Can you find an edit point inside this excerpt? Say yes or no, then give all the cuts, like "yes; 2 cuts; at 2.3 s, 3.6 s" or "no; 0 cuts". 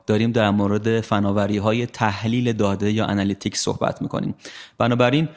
no; 0 cuts